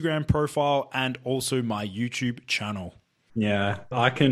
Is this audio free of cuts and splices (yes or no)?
yes